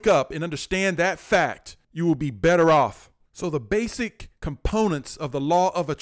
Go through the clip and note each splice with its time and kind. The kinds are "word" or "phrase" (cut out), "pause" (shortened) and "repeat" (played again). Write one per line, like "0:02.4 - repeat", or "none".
0:04.4 - pause